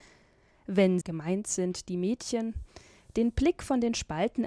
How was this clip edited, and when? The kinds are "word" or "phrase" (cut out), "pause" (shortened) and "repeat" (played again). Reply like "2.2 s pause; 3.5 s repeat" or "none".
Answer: 1.0 s word